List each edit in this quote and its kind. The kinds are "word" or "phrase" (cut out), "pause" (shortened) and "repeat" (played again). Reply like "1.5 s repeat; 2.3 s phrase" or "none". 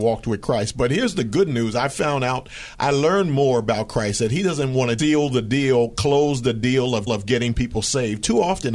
5.0 s word; 7.1 s repeat